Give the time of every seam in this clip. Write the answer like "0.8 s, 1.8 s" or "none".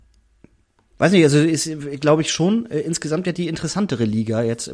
none